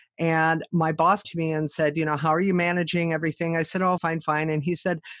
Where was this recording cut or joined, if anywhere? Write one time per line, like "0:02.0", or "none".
0:01.2
0:04.0